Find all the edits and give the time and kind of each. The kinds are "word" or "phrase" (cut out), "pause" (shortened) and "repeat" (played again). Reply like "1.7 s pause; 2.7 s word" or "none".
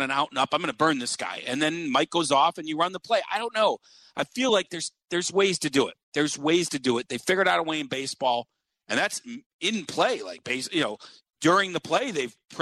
none